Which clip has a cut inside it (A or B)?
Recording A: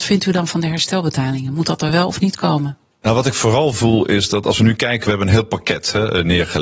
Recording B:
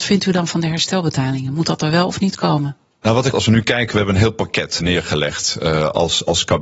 B